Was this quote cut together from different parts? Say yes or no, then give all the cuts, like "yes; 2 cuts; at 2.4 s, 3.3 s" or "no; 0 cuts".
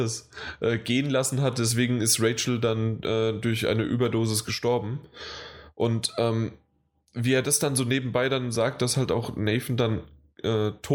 no; 0 cuts